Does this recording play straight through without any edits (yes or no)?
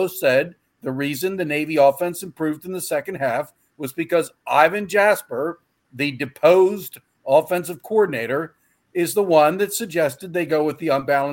yes